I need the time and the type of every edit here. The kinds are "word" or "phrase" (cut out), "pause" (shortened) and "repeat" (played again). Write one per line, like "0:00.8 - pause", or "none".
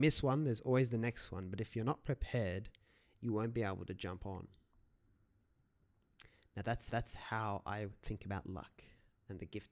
0:06.9 - repeat